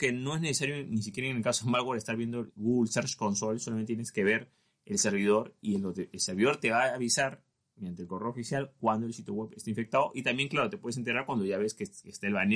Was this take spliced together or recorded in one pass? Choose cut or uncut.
uncut